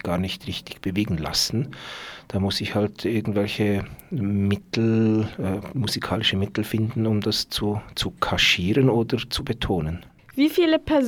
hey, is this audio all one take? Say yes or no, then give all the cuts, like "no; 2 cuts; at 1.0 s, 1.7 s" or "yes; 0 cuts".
yes; 0 cuts